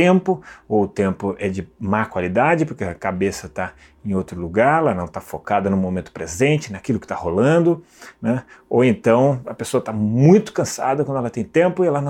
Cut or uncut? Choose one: uncut